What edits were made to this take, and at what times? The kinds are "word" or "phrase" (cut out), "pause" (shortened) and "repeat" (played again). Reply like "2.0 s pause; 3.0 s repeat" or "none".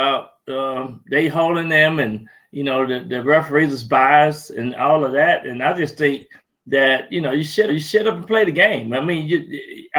7.7 s repeat